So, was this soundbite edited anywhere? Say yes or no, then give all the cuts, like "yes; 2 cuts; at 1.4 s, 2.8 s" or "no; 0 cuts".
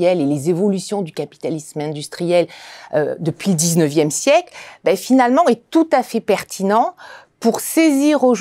no; 0 cuts